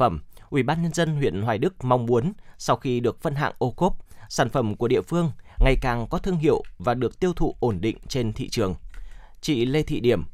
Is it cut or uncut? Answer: uncut